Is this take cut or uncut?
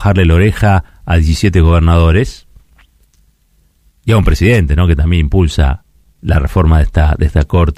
uncut